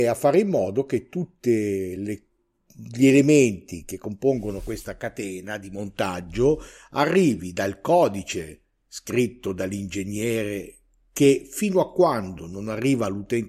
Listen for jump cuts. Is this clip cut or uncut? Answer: uncut